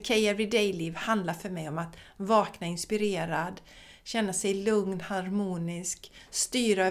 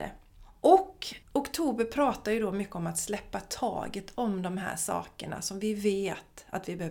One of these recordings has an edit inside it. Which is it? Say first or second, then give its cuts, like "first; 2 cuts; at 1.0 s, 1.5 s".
second; 1 cut; at 1.2 s